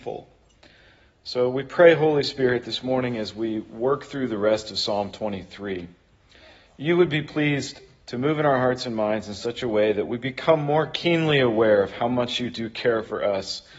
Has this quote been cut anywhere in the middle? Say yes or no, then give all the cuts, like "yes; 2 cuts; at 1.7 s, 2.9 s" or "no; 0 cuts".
no; 0 cuts